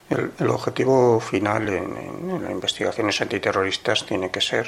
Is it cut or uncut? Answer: uncut